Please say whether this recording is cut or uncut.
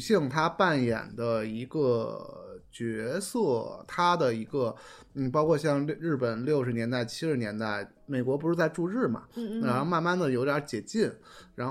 uncut